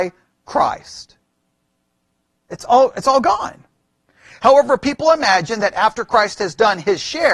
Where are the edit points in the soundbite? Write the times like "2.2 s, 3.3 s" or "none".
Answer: none